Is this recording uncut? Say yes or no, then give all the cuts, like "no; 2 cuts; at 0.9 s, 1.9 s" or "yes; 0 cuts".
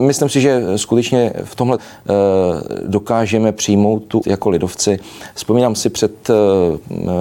no; 2 cuts; at 1.8 s, 4.2 s